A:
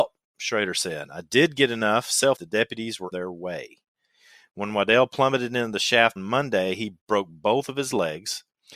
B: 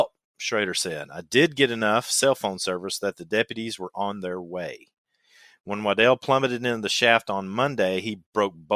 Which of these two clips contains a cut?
A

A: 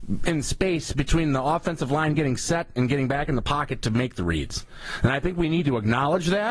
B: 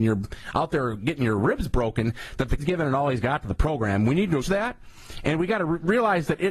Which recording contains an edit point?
B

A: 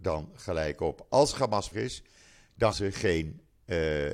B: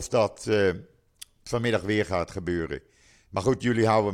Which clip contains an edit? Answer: A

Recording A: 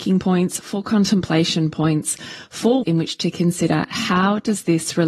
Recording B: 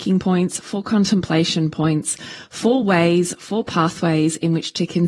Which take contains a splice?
A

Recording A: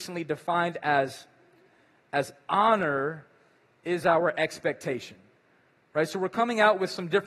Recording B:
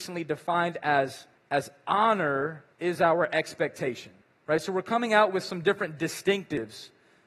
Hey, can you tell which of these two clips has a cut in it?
B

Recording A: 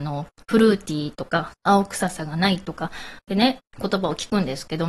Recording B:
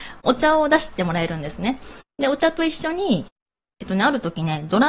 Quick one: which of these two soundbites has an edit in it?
A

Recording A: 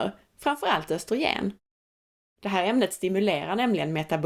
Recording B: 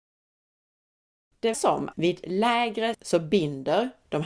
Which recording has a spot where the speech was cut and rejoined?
B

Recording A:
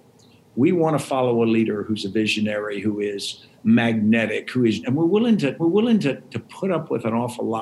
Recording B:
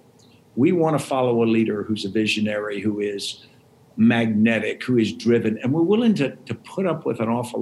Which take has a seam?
A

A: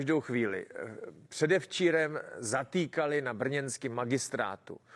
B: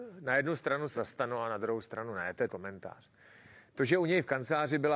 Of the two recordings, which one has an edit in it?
B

